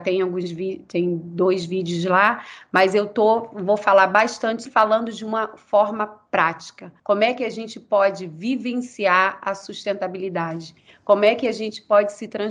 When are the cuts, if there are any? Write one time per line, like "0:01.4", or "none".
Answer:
0:04.7
0:07.0